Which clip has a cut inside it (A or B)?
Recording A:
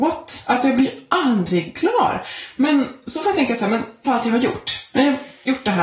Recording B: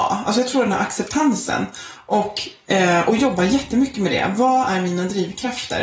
A